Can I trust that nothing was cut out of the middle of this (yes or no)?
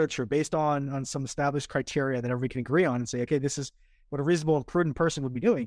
yes